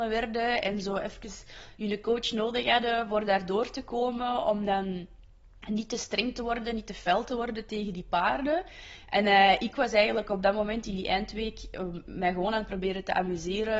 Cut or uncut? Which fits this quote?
uncut